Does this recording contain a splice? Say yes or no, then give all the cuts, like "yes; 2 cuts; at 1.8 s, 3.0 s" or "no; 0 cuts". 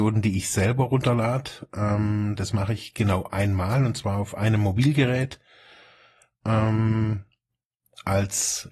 no; 0 cuts